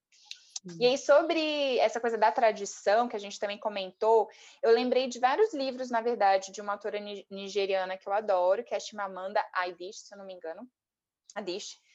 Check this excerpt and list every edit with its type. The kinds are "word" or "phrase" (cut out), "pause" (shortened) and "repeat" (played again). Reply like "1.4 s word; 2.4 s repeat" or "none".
none